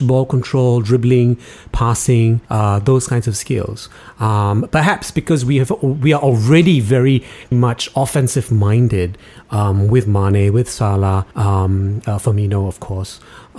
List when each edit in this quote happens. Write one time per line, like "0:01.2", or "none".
0:02.4
0:07.5
0:11.3